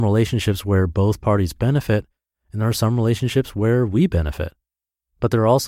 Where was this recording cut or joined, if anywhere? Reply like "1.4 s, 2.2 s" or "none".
none